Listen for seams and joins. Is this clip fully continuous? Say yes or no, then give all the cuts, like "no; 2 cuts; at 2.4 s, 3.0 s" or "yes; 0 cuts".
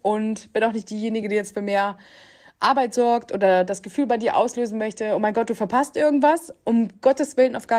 yes; 0 cuts